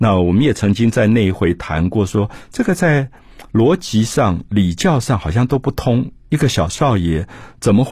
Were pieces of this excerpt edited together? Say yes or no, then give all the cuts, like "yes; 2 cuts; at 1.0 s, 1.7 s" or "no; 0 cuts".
yes; 1 cut; at 3.5 s